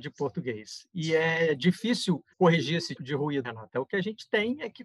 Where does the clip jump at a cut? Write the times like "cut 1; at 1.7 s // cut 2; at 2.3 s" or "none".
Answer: cut 1; at 2.3 s // cut 2; at 3.0 s // cut 3; at 3.4 s